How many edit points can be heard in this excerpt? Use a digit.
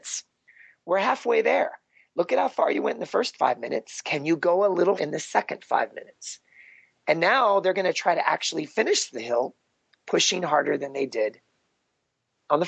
1